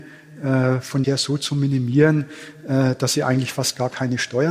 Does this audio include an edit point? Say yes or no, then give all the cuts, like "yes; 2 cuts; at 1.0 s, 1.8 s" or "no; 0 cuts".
yes; 1 cut; at 1.0 s